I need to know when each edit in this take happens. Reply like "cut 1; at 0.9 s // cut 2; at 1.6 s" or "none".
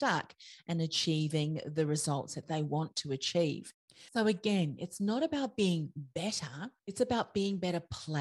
cut 1; at 4.1 s // cut 2; at 6.8 s